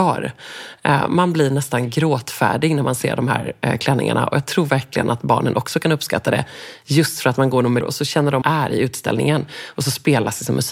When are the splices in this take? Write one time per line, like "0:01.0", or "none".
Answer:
0:07.8
0:08.4